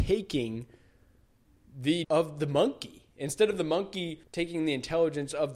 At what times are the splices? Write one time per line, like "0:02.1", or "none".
0:02.0
0:04.2